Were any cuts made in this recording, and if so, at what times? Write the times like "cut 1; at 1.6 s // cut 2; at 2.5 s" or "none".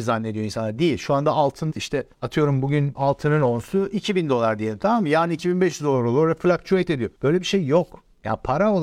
cut 1; at 1.7 s // cut 2; at 2.1 s // cut 3; at 2.9 s // cut 4; at 7.1 s